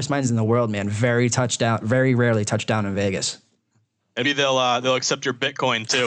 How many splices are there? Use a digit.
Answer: 1